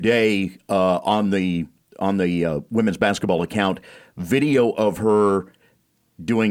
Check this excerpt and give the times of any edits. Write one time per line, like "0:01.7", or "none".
none